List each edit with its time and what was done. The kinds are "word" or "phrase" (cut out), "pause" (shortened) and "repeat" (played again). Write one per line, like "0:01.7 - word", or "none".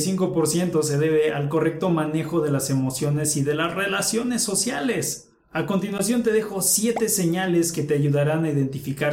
0:05.4 - pause